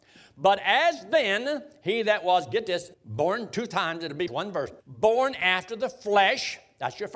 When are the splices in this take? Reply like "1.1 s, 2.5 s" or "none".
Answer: 2.9 s, 4.3 s, 4.8 s